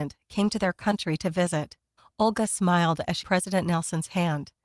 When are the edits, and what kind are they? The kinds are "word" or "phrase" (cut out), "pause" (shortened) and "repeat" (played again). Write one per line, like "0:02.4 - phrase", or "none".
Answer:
0:02.0 - pause
0:03.2 - word